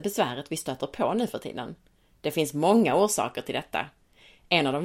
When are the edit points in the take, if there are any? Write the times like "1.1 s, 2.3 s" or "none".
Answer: none